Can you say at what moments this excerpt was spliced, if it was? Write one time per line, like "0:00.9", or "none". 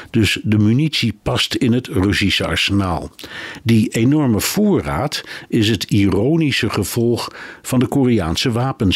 none